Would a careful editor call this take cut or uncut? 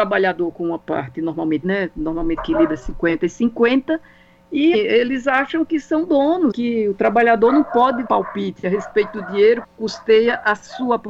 cut